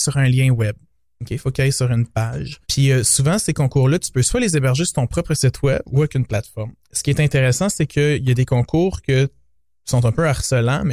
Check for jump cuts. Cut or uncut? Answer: cut